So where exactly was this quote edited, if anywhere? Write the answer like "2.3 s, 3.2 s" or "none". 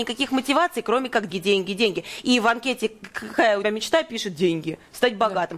1.3 s, 3.6 s